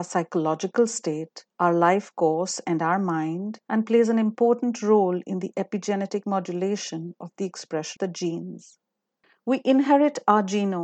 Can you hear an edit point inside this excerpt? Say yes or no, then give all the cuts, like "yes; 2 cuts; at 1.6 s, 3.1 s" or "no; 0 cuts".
yes; 4 cuts; at 1.5 s, 3.6 s, 8.0 s, 9.2 s